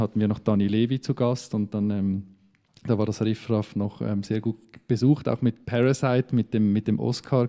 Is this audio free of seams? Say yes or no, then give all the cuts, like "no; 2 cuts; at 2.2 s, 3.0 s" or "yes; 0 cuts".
yes; 0 cuts